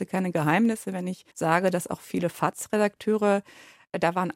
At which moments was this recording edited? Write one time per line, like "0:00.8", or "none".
0:01.3

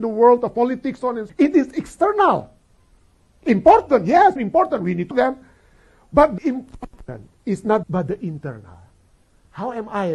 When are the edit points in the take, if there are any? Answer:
0:01.0
0:01.3
0:04.4
0:05.1
0:06.4
0:07.4
0:07.8

